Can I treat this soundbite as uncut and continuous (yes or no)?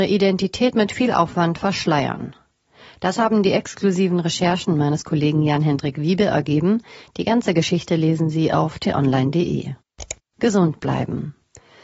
yes